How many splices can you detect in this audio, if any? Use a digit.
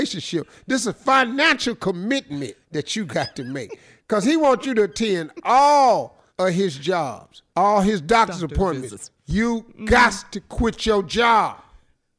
3